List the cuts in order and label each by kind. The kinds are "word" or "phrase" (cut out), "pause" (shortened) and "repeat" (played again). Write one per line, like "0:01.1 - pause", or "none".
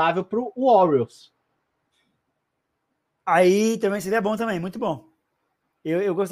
none